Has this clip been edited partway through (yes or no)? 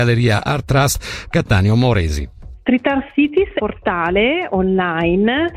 yes